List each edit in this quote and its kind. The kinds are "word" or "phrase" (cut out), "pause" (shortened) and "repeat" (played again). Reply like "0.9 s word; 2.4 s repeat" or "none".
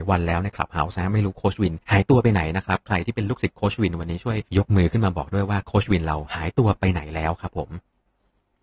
1.8 s pause; 4.5 s pause